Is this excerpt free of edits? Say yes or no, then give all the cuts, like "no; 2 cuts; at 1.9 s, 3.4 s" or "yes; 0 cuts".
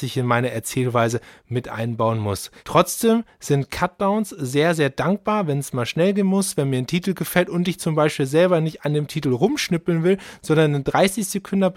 yes; 0 cuts